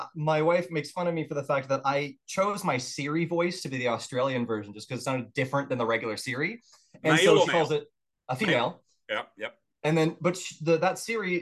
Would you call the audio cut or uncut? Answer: cut